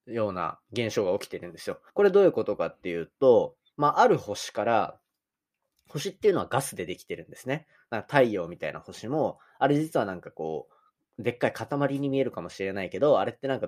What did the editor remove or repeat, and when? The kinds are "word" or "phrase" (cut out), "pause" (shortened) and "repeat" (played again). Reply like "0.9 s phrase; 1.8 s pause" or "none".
1.9 s pause